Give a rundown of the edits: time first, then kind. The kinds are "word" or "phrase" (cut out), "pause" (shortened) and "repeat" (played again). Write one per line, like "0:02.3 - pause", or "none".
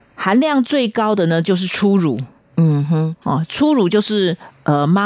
none